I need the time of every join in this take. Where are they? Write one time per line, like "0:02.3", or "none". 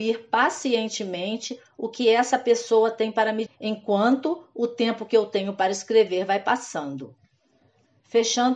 0:03.5